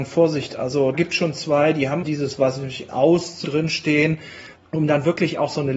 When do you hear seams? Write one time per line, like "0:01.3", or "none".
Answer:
0:00.9
0:02.0
0:02.9
0:03.4
0:04.6